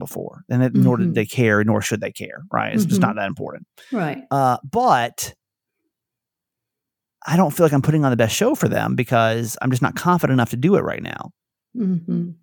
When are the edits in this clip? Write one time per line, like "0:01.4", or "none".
none